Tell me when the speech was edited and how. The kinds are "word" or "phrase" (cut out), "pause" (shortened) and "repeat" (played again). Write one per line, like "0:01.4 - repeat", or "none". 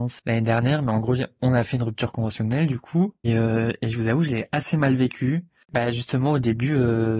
0:03.2 - word